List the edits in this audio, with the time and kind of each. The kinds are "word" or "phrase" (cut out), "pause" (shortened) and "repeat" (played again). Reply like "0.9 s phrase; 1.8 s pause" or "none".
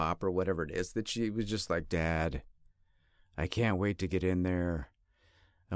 none